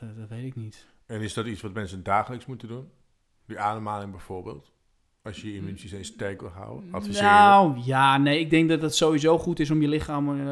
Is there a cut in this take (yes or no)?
no